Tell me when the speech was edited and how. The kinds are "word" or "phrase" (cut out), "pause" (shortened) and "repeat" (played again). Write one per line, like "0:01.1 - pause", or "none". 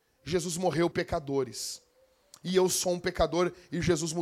0:00.9 - word

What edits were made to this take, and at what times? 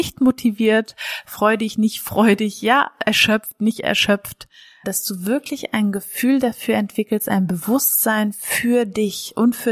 0:04.8 - word

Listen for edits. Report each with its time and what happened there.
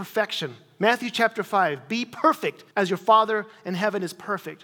0:02.7 - pause

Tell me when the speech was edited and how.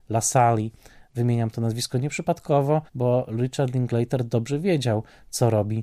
0:02.9 - pause

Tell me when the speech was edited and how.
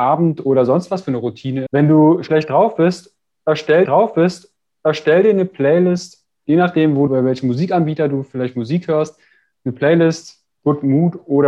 0:01.7 - word
0:03.8 - repeat
0:07.1 - word
0:10.5 - pause

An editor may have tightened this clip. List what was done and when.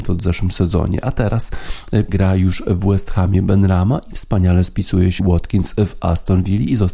0:02.1 - word
0:05.2 - word

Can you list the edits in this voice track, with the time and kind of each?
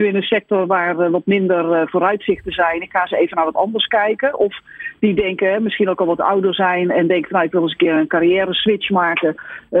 none

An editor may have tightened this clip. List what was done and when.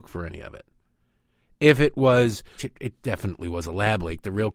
0:02.6 - phrase

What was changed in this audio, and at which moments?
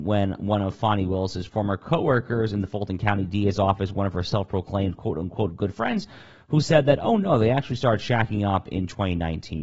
none

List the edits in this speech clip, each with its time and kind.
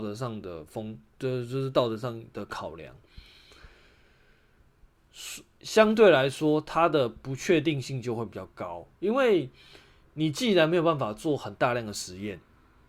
0:08.9 - pause

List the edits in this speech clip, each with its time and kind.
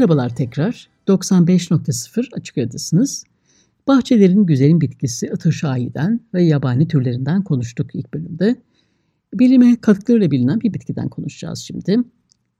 0:10.7 - word

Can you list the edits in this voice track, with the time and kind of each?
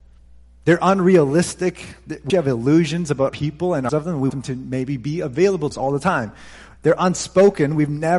0:02.3 - word
0:03.3 - word
0:03.9 - word
0:04.3 - word
0:05.7 - word

